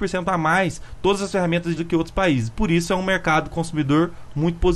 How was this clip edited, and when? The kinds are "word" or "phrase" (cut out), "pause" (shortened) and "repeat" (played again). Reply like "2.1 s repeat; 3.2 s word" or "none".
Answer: 1.8 s word